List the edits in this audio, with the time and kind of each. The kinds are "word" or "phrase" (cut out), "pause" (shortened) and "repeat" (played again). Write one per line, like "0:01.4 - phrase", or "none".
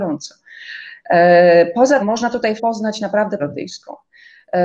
0:02.0 - word
0:02.6 - word
0:03.4 - word